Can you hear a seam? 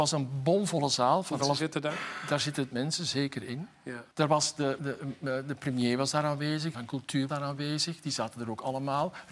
yes; 6 cuts; at 1.4 s, 2.7 s, 4.1 s, 4.8 s, 6.7 s, 7.3 s

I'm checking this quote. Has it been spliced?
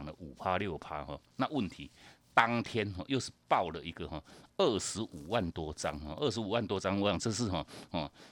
no; 0 cuts

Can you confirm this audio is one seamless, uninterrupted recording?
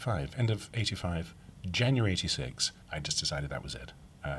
no; 1 cut; at 2.8 s

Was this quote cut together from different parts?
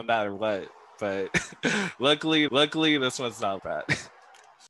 yes; 2 cuts; at 2.5 s, 3.6 s

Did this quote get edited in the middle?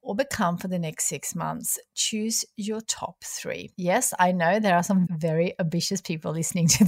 yes; 1 cut; at 5.1 s

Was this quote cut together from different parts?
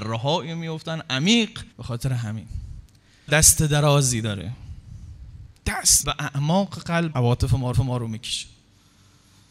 yes; 5 cuts; at 1.7 s, 3.3 s, 6.0 s, 7.1 s, 7.7 s

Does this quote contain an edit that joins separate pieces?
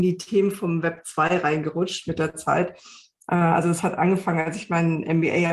no; 0 cuts

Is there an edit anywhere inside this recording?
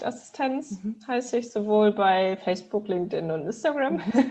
no; 0 cuts

